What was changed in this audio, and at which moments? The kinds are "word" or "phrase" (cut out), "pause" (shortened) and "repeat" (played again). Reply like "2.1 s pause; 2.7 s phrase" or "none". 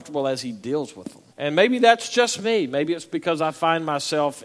1.3 s pause